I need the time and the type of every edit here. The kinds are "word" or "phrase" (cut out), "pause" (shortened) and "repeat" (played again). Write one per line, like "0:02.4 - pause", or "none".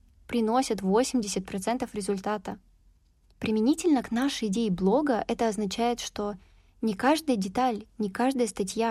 none